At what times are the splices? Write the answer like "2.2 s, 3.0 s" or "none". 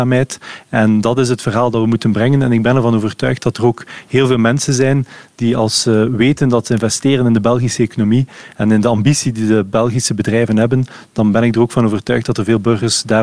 none